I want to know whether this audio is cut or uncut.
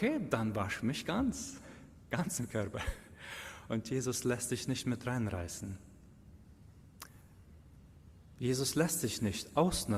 uncut